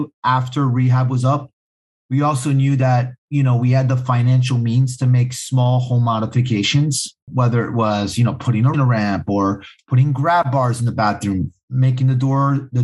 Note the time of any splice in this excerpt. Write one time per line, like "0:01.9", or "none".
0:07.2
0:08.7